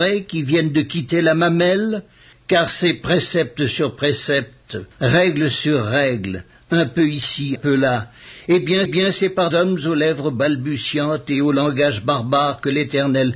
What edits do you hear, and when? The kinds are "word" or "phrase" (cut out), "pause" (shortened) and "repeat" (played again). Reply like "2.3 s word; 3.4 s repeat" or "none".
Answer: 2.3 s pause; 4.9 s pause; 7.6 s word; 8.9 s repeat; 9.5 s word